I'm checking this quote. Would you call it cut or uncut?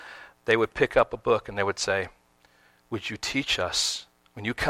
uncut